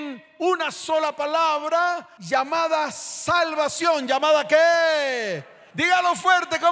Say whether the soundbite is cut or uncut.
uncut